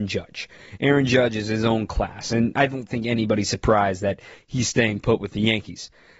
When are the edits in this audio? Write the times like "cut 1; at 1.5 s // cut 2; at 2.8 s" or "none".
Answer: none

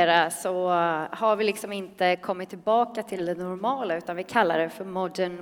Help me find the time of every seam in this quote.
none

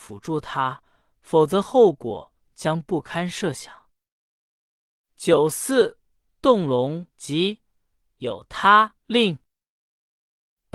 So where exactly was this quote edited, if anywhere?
cut 1; at 7.1 s // cut 2; at 9.0 s

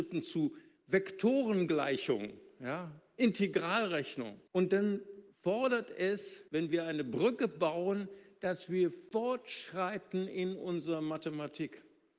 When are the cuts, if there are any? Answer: cut 1; at 4.5 s // cut 2; at 5.3 s // cut 3; at 6.5 s

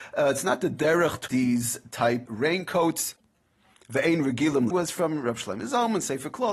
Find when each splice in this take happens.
cut 1; at 1.3 s // cut 2; at 2.3 s // cut 3; at 4.7 s

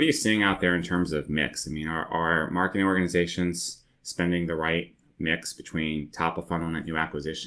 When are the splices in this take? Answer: none

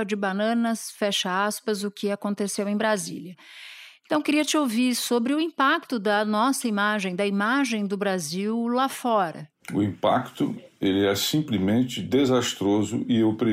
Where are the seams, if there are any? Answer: cut 1; at 9.6 s

